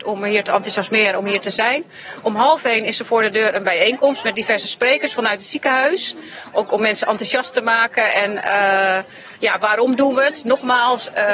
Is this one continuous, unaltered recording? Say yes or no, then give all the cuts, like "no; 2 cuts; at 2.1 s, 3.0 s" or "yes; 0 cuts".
yes; 0 cuts